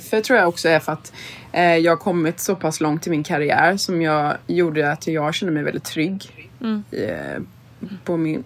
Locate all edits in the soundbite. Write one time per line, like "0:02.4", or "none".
0:04.4
0:06.6